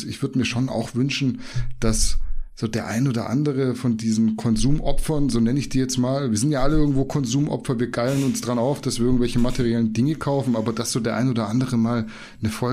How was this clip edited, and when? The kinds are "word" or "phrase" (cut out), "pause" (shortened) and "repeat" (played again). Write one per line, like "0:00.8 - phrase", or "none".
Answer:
none